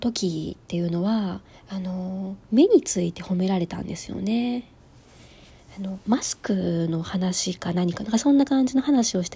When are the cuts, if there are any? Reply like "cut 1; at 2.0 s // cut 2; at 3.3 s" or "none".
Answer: cut 1; at 1.5 s